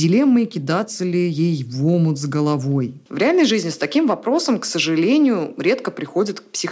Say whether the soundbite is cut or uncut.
cut